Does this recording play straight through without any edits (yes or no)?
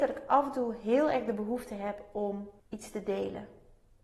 no